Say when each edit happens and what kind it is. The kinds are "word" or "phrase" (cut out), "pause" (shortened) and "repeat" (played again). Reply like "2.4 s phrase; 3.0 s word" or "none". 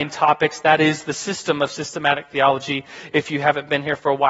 none